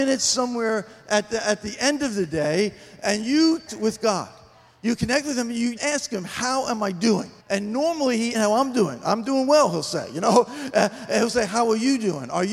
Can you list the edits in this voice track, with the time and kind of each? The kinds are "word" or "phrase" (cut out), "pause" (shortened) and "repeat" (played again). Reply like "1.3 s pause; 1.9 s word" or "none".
3.7 s phrase; 5.8 s word; 7.4 s pause; 8.3 s phrase

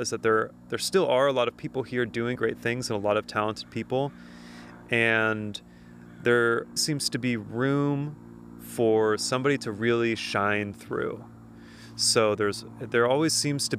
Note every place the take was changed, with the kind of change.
2.4 s word; 6.8 s word

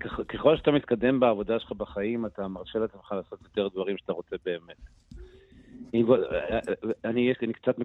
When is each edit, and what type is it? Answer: none

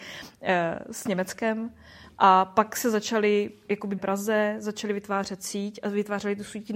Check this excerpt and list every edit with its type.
4.0 s phrase

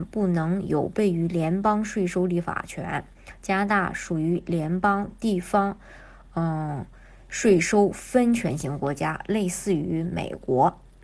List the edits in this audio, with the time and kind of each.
none

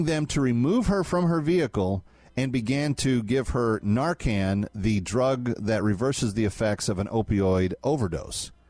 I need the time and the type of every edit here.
none

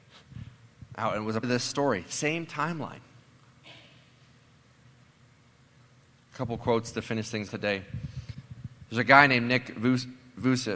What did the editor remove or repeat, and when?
1.4 s word; 7.5 s word

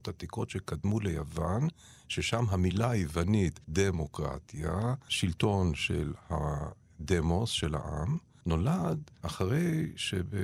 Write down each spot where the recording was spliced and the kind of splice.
3.6 s pause

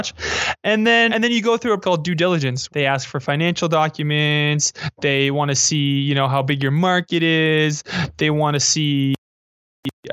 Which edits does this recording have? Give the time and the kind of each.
1.1 s word; 1.8 s word; 2.7 s word

